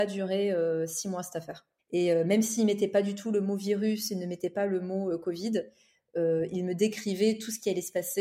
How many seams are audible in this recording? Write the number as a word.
one